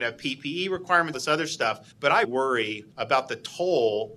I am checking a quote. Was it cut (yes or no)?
yes